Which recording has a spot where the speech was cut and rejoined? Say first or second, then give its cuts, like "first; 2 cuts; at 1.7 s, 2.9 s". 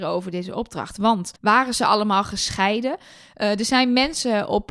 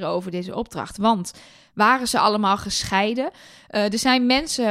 first; 1 cut; at 1.4 s